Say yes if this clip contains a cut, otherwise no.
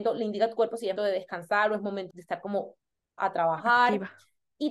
yes